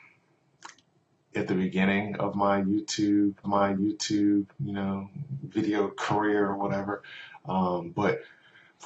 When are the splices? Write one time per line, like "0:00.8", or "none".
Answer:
0:03.4